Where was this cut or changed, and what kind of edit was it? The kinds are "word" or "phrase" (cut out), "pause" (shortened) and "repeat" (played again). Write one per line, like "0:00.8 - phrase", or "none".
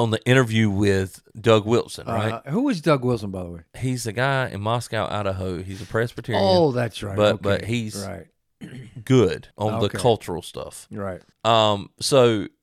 0:09.5 - pause
0:11.3 - pause